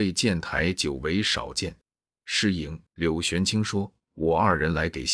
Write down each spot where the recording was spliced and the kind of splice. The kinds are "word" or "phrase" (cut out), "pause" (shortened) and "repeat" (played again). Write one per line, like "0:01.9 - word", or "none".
0:02.9 - pause